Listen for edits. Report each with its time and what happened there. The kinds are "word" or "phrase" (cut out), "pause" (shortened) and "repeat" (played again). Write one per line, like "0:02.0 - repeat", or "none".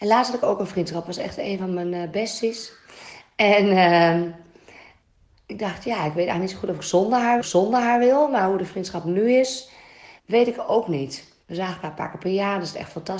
0:05.0 - pause
0:07.4 - repeat
0:10.2 - pause
0:11.4 - pause